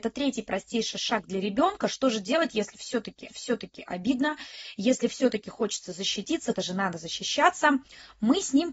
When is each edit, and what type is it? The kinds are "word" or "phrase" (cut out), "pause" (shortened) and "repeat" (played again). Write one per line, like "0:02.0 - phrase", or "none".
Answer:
0:03.3 - repeat
0:06.5 - word